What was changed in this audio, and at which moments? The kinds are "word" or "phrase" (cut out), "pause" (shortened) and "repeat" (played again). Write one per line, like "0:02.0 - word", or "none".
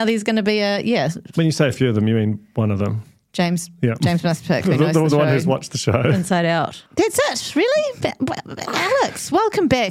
none